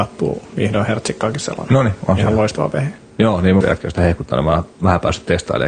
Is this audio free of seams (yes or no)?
no